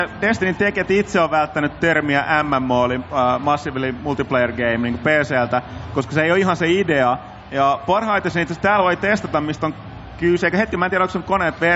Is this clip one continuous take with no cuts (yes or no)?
yes